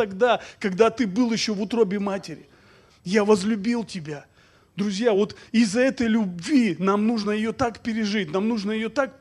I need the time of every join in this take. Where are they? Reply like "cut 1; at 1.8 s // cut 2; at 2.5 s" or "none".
none